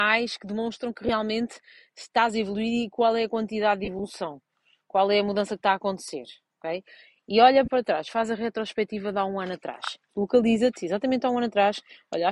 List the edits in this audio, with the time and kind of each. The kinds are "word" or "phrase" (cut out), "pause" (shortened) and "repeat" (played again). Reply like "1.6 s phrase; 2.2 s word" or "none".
none